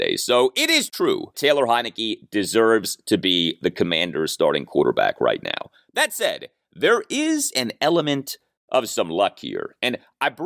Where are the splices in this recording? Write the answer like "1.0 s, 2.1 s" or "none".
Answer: 1.3 s